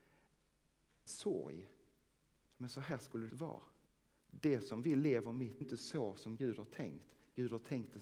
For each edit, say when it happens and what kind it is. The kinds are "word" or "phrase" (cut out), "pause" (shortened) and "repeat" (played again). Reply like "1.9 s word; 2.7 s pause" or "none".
1.1 s word; 3.3 s word; 3.9 s pause; 5.6 s phrase